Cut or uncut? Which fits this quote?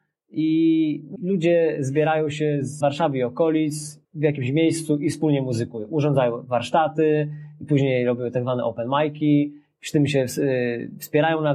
cut